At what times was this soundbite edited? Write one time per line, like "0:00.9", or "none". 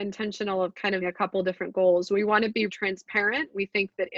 0:01.0
0:02.7